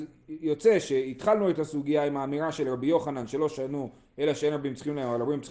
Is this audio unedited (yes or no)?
yes